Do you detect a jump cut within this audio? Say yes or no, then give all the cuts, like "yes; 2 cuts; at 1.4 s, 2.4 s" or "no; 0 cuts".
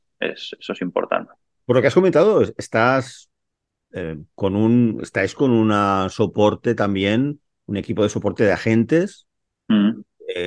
no; 0 cuts